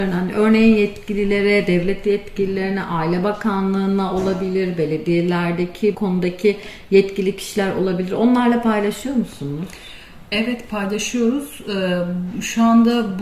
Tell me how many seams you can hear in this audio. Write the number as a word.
one